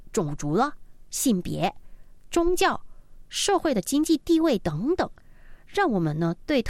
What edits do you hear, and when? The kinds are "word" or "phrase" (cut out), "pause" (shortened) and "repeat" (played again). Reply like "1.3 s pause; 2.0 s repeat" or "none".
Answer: none